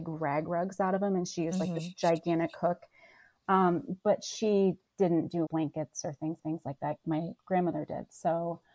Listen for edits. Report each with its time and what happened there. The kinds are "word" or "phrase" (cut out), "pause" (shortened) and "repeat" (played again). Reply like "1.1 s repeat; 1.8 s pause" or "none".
5.5 s word; 6.4 s repeat; 7.0 s word; 7.4 s word